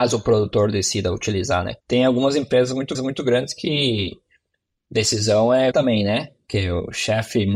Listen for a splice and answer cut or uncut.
cut